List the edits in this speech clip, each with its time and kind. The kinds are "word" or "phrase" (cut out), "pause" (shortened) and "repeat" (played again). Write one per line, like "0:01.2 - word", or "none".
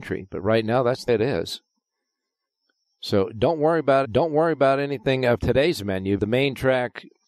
0:01.1 - word
0:04.0 - repeat
0:05.4 - word
0:06.2 - phrase

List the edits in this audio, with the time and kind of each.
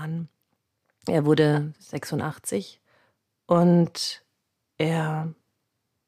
none

